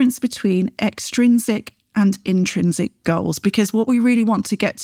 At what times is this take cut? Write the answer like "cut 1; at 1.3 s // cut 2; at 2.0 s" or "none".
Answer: none

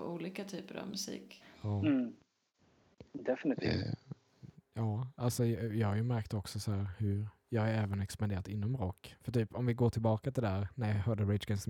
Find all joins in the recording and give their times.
none

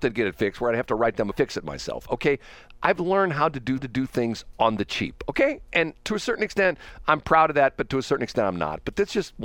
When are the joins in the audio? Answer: cut 1; at 1.3 s // cut 2; at 3.8 s // cut 3; at 6.0 s

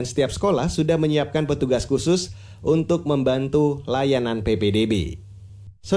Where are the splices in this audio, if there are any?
none

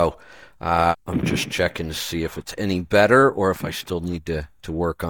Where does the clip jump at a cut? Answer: cut 1; at 1.0 s

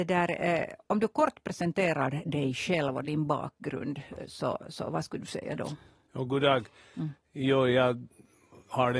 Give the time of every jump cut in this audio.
none

